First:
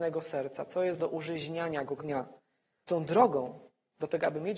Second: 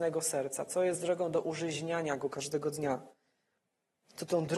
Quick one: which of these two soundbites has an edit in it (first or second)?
first